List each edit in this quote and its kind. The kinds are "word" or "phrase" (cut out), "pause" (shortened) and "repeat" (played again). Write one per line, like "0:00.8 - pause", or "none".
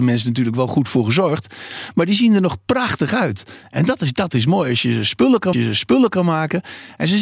0:05.5 - repeat